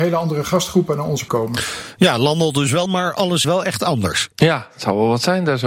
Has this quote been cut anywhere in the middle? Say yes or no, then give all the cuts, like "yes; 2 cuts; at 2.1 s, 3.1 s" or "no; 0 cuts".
yes; 4 cuts; at 1.3 s, 2.9 s, 3.4 s, 4.3 s